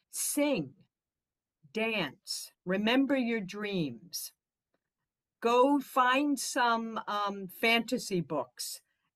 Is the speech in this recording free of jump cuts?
no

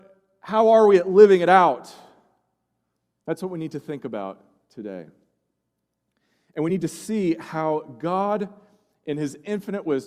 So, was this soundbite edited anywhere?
no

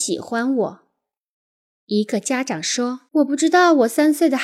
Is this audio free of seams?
no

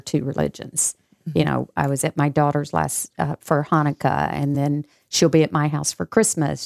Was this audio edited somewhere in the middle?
no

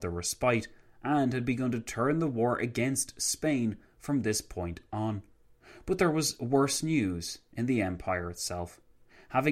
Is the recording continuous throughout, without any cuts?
yes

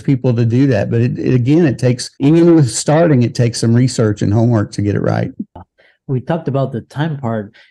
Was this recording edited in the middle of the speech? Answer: yes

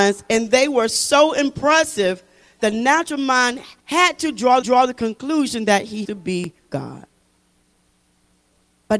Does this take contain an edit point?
yes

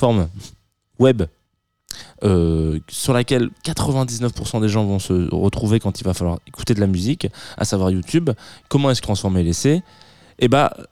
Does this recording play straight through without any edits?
no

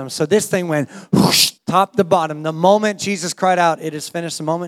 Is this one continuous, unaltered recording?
no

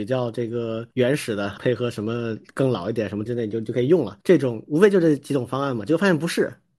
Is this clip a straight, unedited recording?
no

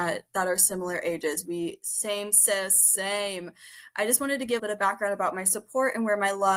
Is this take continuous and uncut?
no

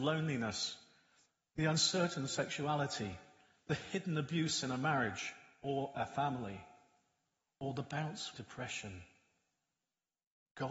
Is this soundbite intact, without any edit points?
no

